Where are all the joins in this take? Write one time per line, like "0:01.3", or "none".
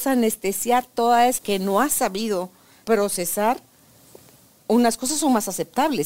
0:01.4
0:02.8